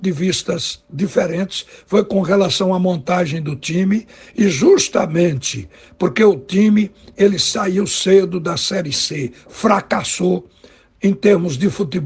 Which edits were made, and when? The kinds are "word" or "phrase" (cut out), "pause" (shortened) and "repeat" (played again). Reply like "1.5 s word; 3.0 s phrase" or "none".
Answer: none